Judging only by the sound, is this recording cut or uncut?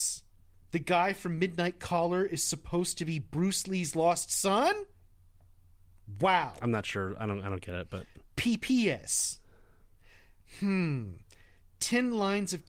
uncut